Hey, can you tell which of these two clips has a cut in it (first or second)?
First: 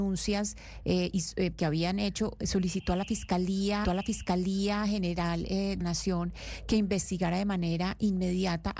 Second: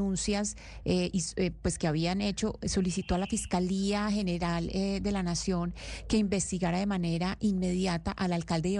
first